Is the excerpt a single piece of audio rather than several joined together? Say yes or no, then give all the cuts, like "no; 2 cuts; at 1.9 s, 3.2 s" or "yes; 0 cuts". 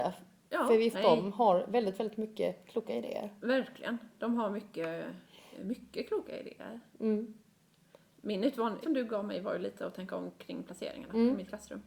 no; 2 cuts; at 0.9 s, 8.8 s